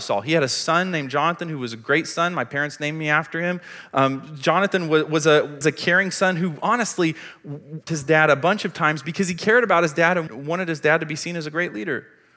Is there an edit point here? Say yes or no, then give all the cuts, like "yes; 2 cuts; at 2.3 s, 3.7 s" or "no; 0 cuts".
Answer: yes; 3 cuts; at 5.6 s, 7.9 s, 10.3 s